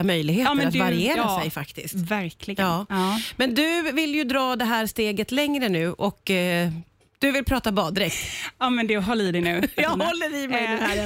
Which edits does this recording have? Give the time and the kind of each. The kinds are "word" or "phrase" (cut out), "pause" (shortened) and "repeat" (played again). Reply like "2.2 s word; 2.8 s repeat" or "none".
none